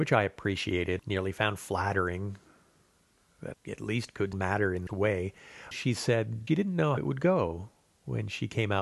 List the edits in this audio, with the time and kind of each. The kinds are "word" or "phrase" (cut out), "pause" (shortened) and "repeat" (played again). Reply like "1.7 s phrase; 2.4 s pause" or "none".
1.0 s word; 3.5 s word; 4.3 s word; 4.9 s word; 5.7 s word; 6.5 s word; 7.0 s word